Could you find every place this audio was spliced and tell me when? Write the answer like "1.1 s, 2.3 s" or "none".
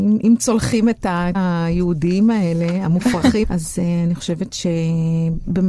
1.3 s, 3.4 s

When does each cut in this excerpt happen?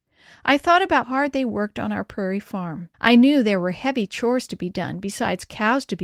1.0 s, 2.9 s

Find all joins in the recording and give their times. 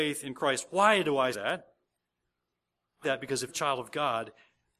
1.3 s, 3.0 s, 3.5 s

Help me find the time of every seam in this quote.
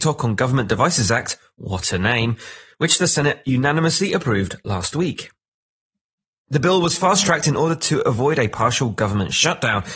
none

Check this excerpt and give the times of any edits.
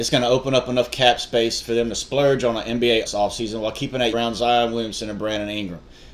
3.1 s, 4.1 s

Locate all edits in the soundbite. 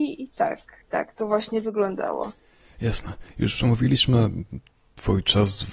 none

